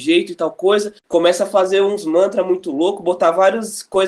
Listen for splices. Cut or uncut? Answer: cut